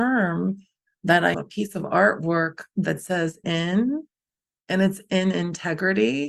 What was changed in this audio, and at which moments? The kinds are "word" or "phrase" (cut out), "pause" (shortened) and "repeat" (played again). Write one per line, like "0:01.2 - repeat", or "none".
0:01.3 - word
0:03.4 - word